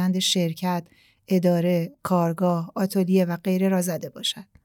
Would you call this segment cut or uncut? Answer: uncut